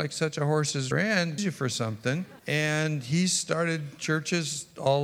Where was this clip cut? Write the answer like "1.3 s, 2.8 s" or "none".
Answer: 0.9 s, 1.4 s, 2.4 s